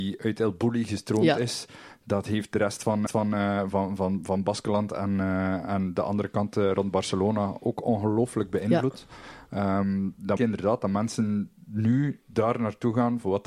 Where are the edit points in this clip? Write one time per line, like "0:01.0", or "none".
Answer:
0:03.1
0:10.4